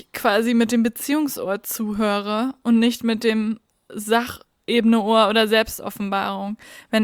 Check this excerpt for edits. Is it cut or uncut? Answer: uncut